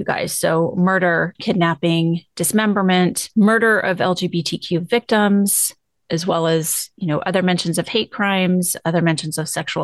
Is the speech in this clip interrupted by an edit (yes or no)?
no